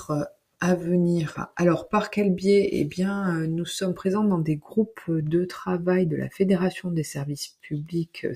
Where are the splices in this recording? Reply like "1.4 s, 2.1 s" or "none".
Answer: none